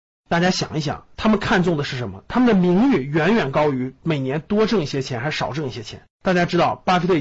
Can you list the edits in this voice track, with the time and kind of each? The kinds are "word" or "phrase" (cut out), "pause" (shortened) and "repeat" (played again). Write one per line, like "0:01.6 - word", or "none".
0:06.1 - pause